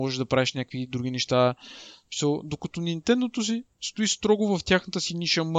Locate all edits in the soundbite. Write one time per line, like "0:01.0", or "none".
none